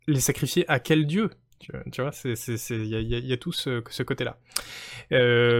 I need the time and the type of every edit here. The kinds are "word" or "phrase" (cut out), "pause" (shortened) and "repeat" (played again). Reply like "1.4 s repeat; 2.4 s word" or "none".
none

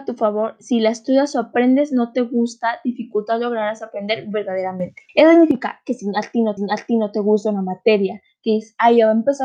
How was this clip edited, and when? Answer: 5.1 s pause; 6.6 s repeat

